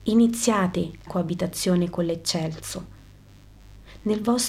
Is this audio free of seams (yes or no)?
no